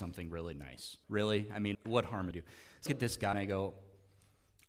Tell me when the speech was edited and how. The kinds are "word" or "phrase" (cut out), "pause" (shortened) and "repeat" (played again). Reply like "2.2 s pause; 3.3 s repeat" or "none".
1.0 s pause; 1.7 s word; 2.3 s phrase; 2.9 s phrase; 3.3 s word